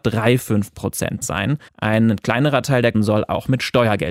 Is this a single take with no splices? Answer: no; 3 cuts; at 1.2 s, 1.7 s, 2.9 s

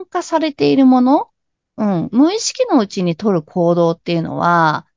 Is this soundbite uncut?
yes; 0 cuts

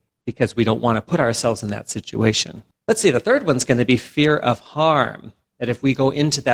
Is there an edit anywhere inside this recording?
no; 0 cuts

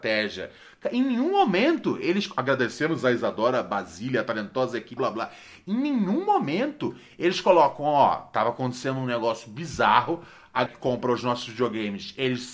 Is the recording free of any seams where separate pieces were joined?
no; 2 cuts; at 5.0 s, 10.7 s

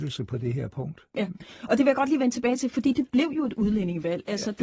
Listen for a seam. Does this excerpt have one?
no; 0 cuts

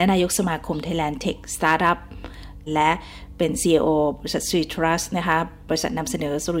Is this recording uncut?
no; 1 cut; at 2.7 s

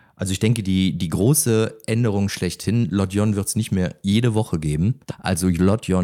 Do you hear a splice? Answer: no; 0 cuts

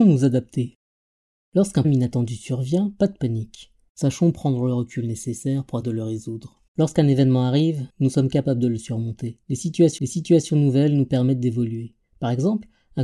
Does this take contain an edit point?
yes; 6 cuts; at 1.8 s, 5.8 s, 6.7 s, 7.9 s, 9.4 s, 10.0 s

